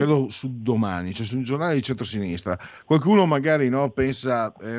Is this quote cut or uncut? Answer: uncut